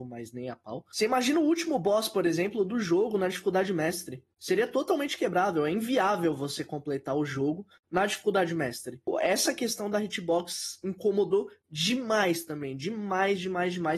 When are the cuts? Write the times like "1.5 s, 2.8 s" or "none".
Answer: none